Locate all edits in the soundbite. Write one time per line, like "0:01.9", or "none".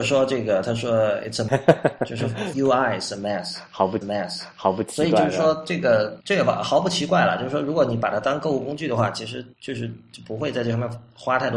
0:01.5
0:02.5
0:04.0
0:06.2
0:09.5

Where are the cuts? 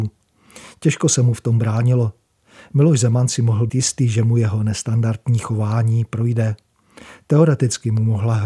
0:03.7

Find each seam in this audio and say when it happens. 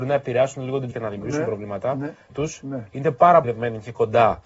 0:00.9
0:02.3
0:03.4

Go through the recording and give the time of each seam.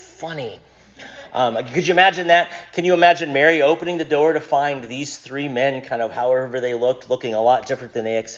none

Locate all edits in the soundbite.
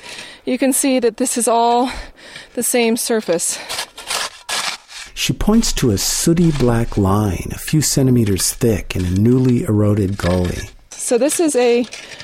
none

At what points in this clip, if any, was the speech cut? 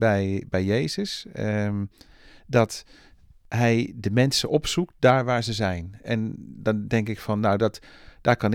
none

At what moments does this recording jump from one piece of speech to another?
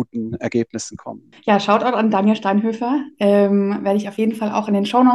0:01.4

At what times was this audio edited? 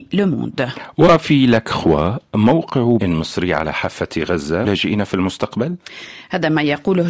0:03.0
0:04.6

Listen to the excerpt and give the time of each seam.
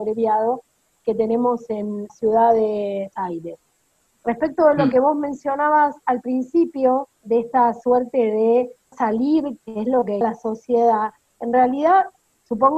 0:02.1
0:03.1
0:07.2
0:08.9
0:09.6
0:10.2

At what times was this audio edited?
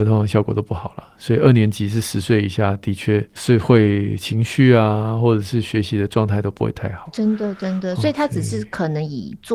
0:03.4

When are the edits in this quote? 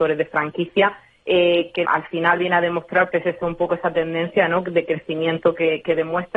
0:01.8
0:03.1

